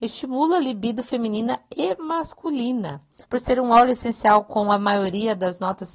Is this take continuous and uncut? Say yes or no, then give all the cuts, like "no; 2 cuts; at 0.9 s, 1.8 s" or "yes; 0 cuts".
no; 1 cut; at 3.2 s